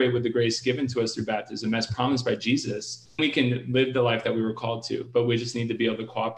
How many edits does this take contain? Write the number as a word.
one